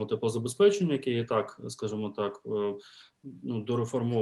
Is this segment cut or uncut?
uncut